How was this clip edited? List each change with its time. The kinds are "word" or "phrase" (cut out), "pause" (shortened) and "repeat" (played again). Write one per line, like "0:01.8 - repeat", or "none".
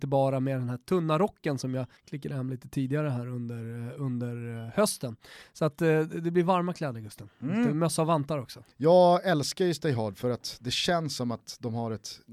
0:02.0 - pause
0:08.7 - pause